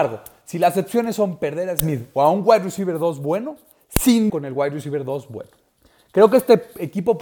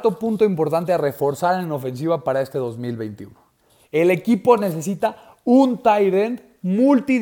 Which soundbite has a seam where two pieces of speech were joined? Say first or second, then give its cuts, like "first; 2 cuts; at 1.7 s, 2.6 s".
first; 1 cut; at 4.3 s